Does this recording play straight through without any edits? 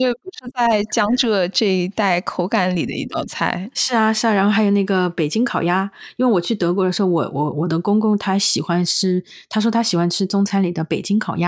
no; 1 cut; at 3.7 s

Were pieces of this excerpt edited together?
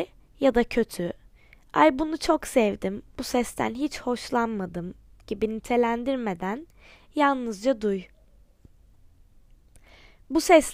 no; 0 cuts

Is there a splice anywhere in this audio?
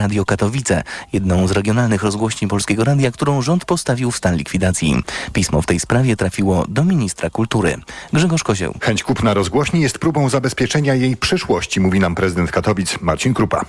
no; 0 cuts

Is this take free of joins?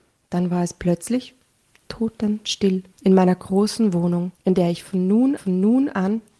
no; 3 cuts; at 2.9 s, 4.3 s, 5.4 s

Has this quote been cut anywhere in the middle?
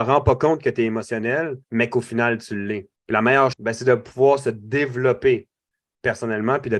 yes; 3 cuts; at 1.6 s, 3.0 s, 3.5 s

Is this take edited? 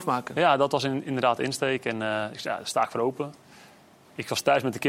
no; 0 cuts

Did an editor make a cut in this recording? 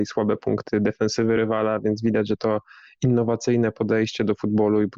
no; 0 cuts

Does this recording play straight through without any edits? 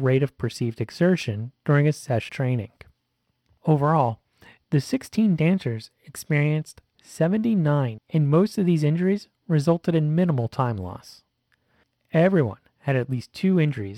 no; 2 cuts; at 2.3 s, 8.0 s

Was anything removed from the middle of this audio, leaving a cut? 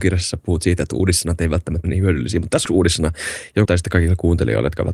yes; 3 cuts; at 1.8 s, 2.7 s, 3.7 s

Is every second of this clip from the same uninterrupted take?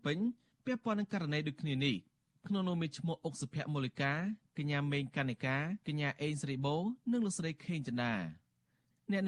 no; 1 cut; at 5.8 s

